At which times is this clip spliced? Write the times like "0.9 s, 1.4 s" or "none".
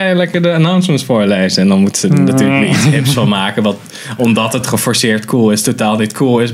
none